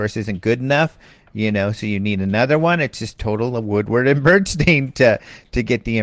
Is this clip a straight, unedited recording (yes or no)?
yes